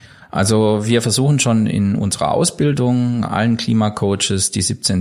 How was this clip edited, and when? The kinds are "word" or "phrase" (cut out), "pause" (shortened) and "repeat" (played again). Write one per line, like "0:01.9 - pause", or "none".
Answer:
none